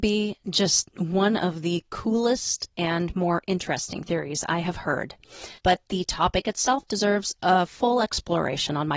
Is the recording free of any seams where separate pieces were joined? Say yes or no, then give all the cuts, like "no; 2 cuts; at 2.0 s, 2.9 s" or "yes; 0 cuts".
no; 1 cut; at 5.6 s